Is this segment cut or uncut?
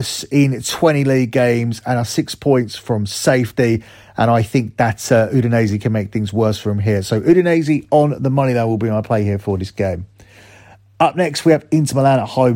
uncut